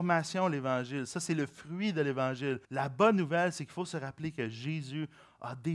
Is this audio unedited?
no; 1 cut; at 2.6 s

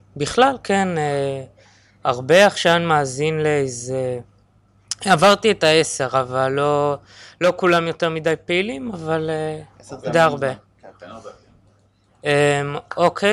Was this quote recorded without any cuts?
yes; 0 cuts

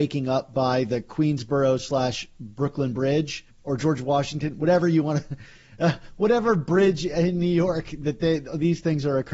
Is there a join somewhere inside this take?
no; 0 cuts

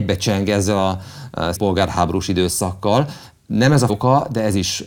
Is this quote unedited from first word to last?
no; 2 cuts; at 1.5 s, 3.9 s

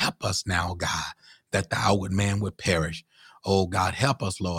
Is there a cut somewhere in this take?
no; 0 cuts

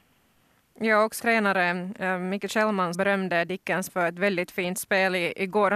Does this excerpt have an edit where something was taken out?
yes; 3 cuts; at 1.2 s, 2.9 s, 3.9 s

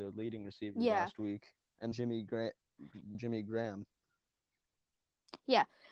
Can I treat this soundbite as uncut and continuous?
no; 2 cuts; at 1.9 s, 3.1 s

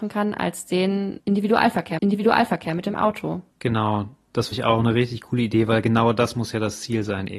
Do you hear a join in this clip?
yes; 3 cuts; at 2.0 s, 3.5 s, 4.5 s

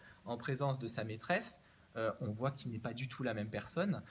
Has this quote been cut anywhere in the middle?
no; 0 cuts

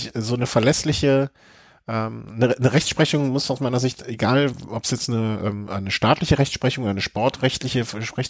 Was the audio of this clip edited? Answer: no; 0 cuts

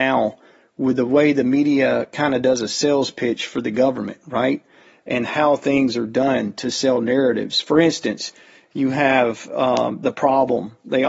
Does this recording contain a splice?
no; 0 cuts

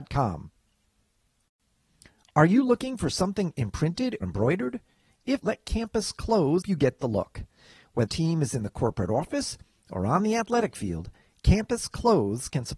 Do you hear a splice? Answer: yes; 4 cuts; at 4.2 s, 5.4 s, 6.6 s, 8.1 s

